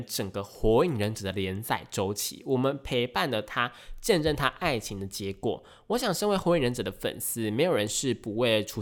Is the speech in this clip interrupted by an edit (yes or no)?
no